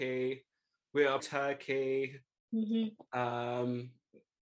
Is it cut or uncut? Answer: cut